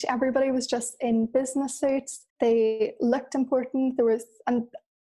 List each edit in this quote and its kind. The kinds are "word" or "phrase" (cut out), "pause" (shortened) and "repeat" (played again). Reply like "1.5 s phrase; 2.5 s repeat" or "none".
2.3 s pause